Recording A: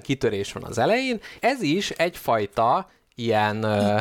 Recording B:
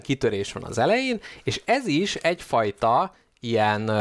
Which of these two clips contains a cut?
A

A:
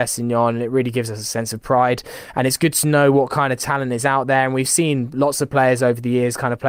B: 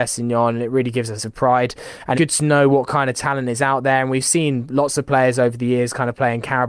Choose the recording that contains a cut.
B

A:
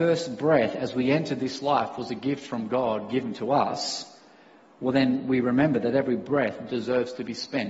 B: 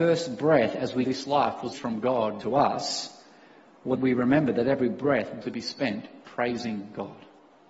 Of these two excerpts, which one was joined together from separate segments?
B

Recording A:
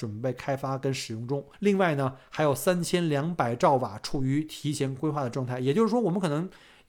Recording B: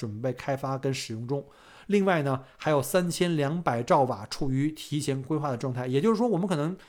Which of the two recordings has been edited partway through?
A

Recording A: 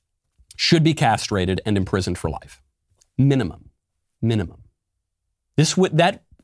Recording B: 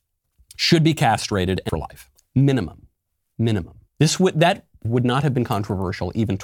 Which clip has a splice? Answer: B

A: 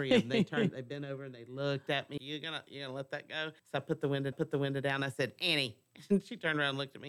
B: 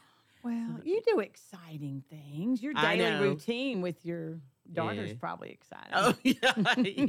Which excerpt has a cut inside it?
A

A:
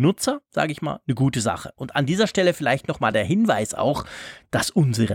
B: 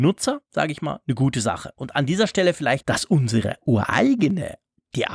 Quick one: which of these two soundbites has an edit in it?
B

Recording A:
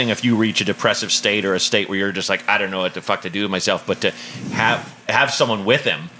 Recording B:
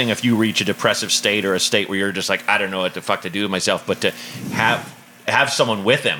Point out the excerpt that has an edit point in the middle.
A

